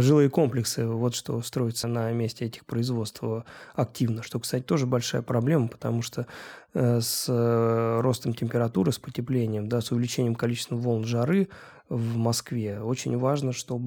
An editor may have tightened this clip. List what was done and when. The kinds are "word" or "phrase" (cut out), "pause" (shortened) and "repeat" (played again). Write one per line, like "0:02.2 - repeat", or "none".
0:01.8 - word